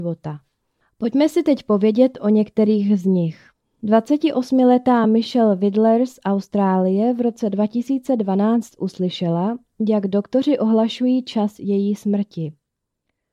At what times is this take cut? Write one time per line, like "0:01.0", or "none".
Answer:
none